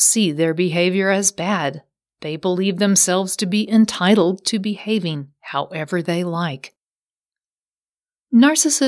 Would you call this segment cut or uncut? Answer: uncut